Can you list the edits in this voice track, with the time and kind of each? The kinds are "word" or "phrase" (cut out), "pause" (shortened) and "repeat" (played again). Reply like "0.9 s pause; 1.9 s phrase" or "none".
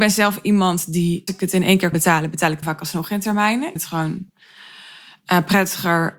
1.3 s word; 1.9 s word; 2.6 s word; 3.8 s word; 4.3 s pause